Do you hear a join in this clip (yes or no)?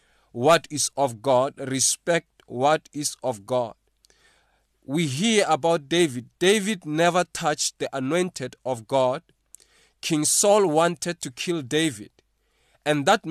no